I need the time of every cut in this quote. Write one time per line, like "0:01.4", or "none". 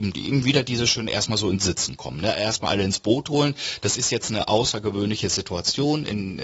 none